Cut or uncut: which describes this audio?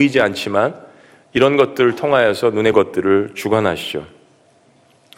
cut